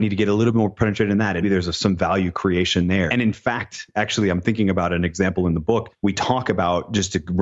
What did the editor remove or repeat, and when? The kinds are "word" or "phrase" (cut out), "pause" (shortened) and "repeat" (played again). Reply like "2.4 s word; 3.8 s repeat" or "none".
1.4 s word; 3.1 s word